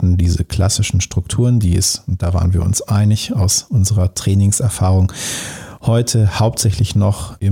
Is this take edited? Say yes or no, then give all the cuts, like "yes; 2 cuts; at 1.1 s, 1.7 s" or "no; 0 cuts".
no; 0 cuts